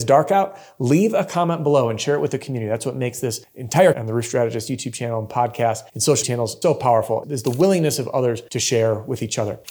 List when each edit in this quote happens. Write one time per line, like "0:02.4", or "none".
0:03.9
0:05.9
0:06.2
0:06.6
0:07.2
0:08.5